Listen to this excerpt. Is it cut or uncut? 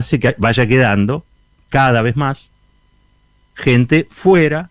uncut